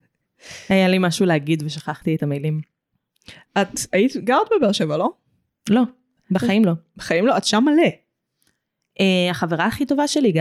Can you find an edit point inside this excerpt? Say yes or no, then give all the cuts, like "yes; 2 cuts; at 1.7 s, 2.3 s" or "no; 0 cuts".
no; 0 cuts